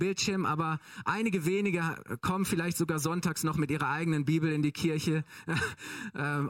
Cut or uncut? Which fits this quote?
uncut